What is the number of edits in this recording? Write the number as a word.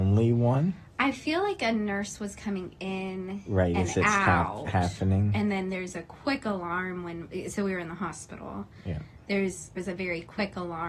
one